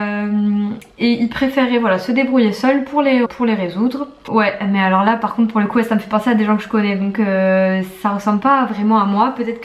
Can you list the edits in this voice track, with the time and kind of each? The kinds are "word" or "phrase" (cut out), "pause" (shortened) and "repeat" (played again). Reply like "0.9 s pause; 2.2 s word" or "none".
3.2 s word